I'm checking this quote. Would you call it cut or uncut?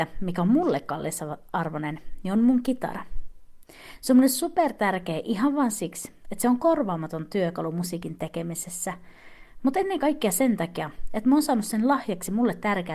uncut